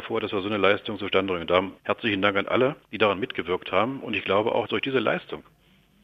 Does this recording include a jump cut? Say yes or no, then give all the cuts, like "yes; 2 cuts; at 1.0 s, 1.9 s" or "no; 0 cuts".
yes; 3 cuts; at 1.8 s, 2.8 s, 4.7 s